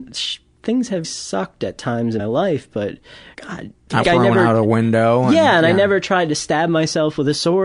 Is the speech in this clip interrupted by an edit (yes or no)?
yes